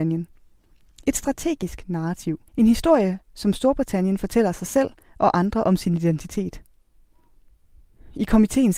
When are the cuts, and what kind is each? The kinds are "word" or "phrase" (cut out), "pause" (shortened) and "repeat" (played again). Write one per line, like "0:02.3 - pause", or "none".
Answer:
0:02.5 - pause